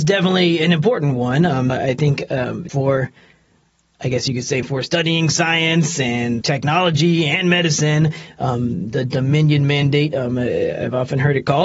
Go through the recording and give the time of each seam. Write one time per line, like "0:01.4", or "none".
0:01.7
0:02.7
0:04.6
0:06.4